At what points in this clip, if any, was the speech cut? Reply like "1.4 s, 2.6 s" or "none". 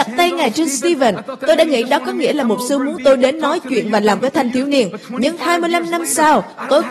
4.2 s